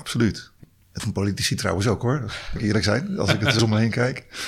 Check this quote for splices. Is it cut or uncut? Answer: cut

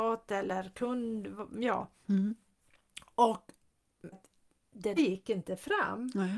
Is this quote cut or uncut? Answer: cut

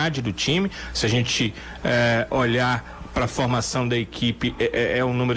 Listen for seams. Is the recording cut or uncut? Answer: uncut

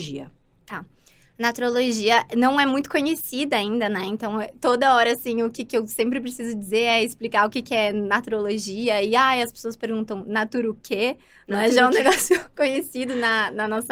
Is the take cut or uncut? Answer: uncut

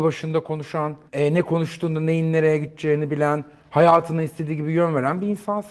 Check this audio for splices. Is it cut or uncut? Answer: cut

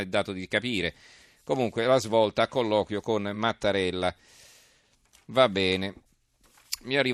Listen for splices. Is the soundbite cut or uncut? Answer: uncut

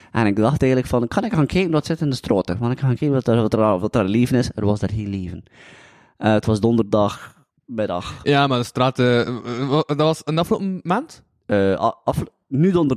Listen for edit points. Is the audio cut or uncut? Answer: uncut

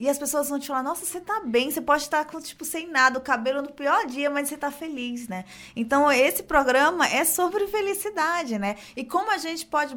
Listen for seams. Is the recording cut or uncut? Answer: uncut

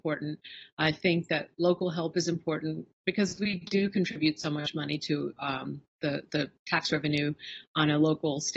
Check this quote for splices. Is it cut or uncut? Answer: uncut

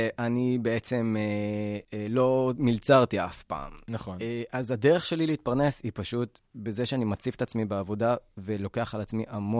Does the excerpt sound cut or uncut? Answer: cut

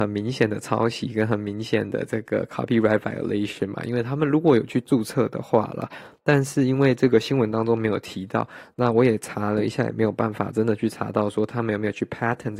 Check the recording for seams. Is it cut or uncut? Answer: uncut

